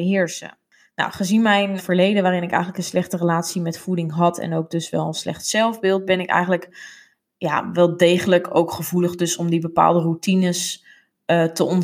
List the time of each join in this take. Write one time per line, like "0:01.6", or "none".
0:01.8